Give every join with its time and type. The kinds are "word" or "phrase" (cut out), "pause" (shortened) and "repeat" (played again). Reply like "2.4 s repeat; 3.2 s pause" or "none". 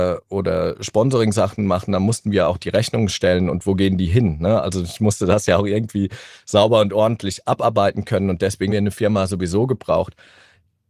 8.7 s word

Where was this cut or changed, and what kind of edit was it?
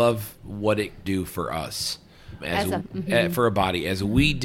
1.0 s word; 2.4 s word; 2.8 s word

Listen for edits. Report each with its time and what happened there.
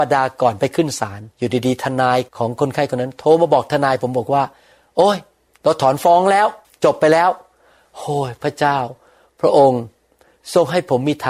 1.3 s pause; 2.3 s pause; 6.6 s pause

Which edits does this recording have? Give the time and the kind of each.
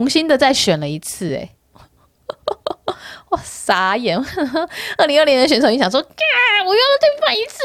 none

